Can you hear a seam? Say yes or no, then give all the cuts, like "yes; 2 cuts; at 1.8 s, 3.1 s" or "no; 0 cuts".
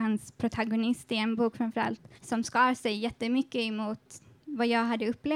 yes; 1 cut; at 2.2 s